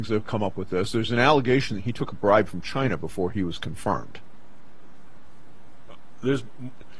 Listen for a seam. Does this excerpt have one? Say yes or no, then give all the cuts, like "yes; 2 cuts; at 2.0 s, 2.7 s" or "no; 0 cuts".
no; 0 cuts